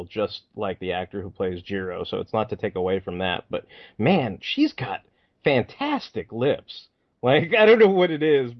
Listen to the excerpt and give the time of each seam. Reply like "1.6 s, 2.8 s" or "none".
none